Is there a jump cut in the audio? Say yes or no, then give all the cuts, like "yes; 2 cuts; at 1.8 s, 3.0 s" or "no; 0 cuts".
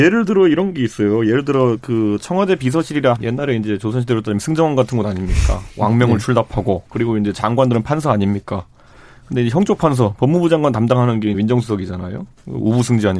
yes; 3 cuts; at 3.2 s, 6.9 s, 11.3 s